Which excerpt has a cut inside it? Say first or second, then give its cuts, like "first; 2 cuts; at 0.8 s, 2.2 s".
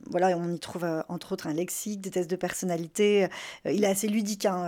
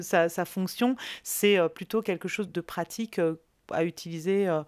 second; 1 cut; at 2.5 s